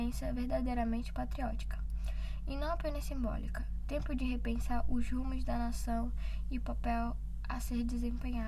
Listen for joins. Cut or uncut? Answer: uncut